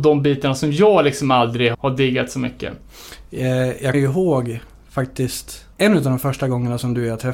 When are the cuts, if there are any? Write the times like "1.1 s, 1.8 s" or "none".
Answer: 1.7 s, 3.9 s, 5.7 s